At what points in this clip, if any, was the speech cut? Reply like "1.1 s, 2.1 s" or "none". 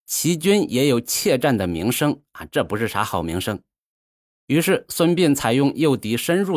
none